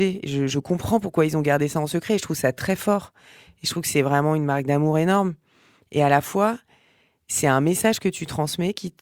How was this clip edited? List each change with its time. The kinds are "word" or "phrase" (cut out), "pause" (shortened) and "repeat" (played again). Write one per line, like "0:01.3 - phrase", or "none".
none